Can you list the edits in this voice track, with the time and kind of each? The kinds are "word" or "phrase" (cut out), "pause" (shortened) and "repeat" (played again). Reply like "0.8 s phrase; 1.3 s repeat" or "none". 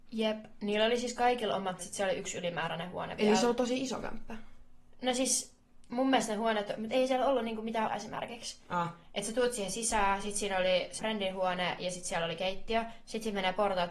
1.8 s word; 7.9 s word; 11.0 s word